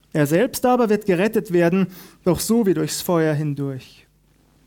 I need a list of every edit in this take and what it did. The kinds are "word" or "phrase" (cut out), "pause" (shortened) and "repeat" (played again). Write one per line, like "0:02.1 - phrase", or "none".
none